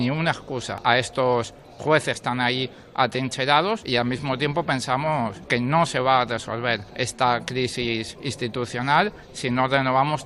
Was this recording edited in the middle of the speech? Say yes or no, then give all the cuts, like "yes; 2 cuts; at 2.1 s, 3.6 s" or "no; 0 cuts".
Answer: no; 0 cuts